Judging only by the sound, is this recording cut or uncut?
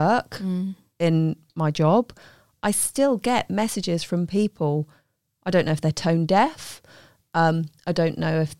uncut